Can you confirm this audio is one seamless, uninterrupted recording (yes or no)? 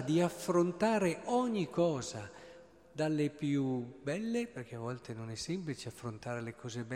yes